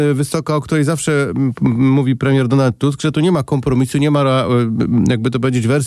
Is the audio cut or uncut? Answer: uncut